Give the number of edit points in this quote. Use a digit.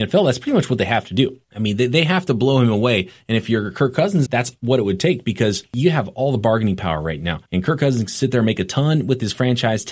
3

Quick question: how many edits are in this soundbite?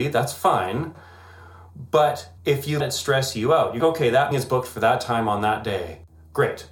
4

